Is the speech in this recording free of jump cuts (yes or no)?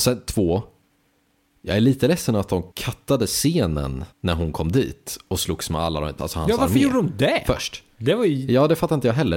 no